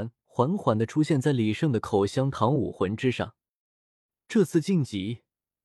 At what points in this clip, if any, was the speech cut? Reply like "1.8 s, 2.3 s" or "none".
none